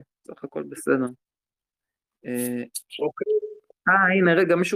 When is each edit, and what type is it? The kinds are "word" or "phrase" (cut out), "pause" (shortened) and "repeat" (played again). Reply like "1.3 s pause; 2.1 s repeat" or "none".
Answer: none